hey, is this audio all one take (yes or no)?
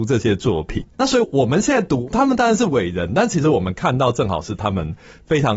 no